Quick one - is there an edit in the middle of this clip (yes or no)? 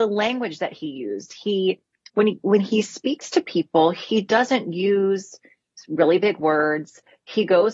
no